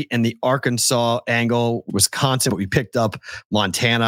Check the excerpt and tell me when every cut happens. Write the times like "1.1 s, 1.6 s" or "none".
1.9 s, 2.5 s